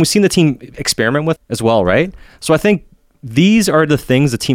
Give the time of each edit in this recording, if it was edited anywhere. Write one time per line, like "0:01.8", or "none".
0:01.4